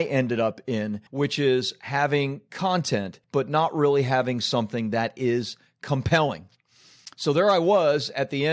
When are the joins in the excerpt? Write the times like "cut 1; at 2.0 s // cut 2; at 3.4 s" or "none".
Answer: cut 1; at 1.1 s // cut 2; at 3.2 s